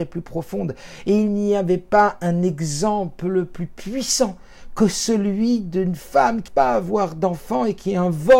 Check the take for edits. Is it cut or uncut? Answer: cut